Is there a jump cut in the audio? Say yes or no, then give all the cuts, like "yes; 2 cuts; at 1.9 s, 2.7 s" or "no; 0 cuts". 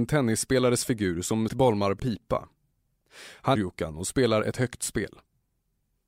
yes; 3 cuts; at 1.5 s, 2.0 s, 3.5 s